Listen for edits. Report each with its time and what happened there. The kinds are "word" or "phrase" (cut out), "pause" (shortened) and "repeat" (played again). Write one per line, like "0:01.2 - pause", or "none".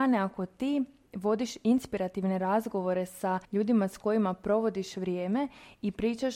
0:03.4 - pause